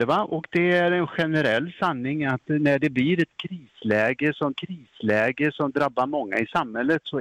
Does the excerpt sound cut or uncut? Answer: cut